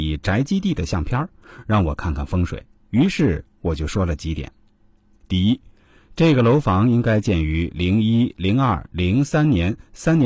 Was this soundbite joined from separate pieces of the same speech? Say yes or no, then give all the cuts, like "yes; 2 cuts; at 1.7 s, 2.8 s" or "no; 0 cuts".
no; 0 cuts